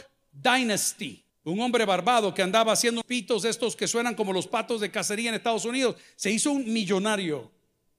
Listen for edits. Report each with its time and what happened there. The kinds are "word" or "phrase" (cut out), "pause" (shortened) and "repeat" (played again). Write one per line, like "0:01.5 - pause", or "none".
0:01.3 - pause
0:03.0 - word